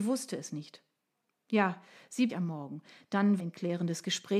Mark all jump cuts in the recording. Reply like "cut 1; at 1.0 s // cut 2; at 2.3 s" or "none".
cut 1; at 2.3 s // cut 2; at 3.4 s